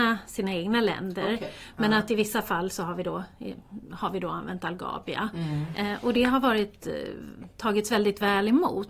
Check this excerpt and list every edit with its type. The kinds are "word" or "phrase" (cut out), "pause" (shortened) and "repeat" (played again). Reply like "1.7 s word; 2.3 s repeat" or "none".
none